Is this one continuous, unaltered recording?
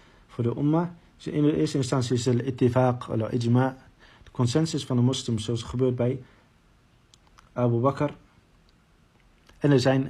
yes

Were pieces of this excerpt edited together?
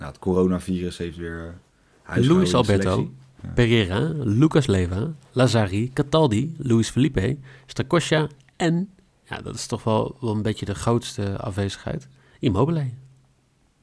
no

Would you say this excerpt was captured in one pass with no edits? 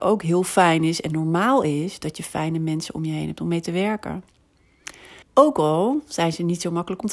no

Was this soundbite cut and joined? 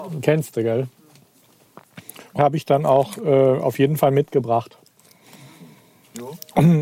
yes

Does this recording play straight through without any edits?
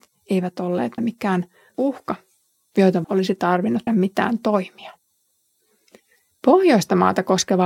no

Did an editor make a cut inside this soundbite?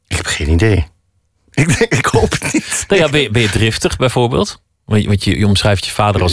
no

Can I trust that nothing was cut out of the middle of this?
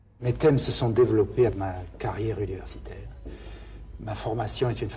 no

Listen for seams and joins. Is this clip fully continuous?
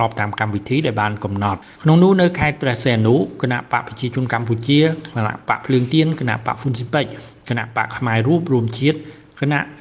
no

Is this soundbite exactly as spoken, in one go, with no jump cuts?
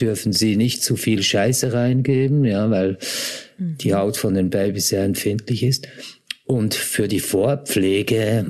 yes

